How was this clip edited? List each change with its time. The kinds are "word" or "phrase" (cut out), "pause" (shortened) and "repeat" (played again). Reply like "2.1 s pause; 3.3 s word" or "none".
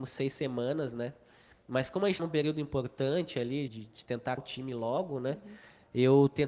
2.2 s word; 3.7 s word; 4.4 s word